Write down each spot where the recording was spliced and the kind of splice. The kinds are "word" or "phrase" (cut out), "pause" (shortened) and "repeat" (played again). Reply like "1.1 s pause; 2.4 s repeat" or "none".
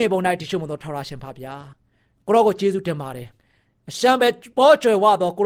1.7 s pause; 3.4 s pause